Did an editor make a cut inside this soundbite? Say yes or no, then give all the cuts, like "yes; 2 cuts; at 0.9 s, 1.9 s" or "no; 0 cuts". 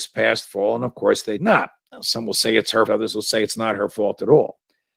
yes; 2 cuts; at 1.4 s, 2.9 s